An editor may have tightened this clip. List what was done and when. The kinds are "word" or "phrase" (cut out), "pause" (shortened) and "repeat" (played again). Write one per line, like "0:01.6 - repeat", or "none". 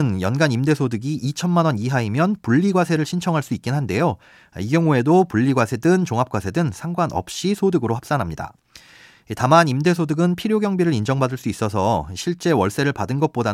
none